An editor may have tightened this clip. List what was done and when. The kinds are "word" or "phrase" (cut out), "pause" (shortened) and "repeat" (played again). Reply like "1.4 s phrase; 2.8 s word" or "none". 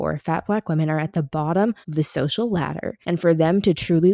1.8 s pause; 3.0 s pause

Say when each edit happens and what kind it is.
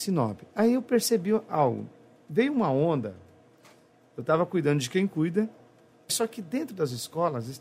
6.1 s word

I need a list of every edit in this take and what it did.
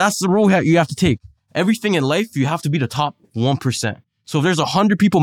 none

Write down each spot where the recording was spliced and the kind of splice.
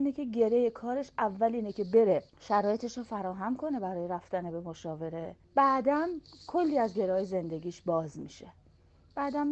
2.3 s pause; 5.4 s pause

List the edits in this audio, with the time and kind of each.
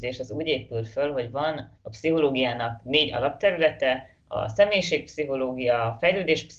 1.7 s pause; 4.2 s pause

